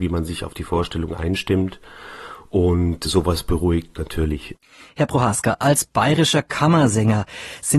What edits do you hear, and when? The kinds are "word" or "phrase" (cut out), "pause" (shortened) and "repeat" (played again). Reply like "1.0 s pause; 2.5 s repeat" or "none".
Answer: none